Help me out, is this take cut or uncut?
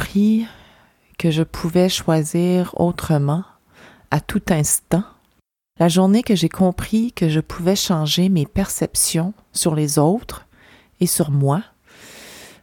uncut